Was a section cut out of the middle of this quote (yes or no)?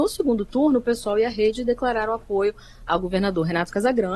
no